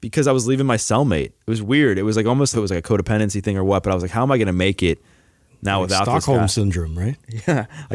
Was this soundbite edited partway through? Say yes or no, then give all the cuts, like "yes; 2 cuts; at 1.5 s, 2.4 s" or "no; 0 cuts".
yes; 2 cuts; at 1.4 s, 2.5 s